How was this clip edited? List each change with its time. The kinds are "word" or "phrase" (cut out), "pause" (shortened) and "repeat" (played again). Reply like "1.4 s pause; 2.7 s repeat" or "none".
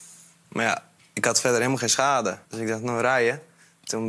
2.4 s pause